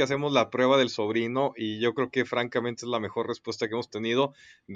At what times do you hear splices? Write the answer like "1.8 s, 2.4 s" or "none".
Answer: none

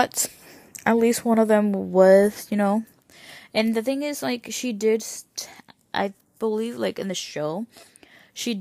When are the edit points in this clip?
none

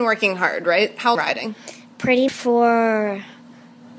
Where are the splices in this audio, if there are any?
1.2 s, 2.3 s

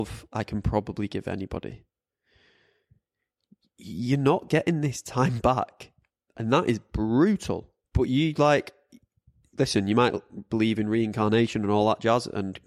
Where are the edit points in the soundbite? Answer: 7.8 s

